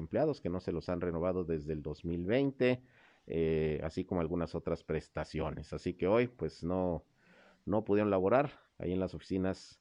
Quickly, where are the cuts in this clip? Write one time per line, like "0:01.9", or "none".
none